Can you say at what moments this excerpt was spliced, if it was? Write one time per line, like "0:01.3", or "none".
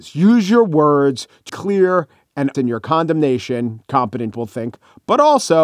0:01.5
0:02.5
0:04.3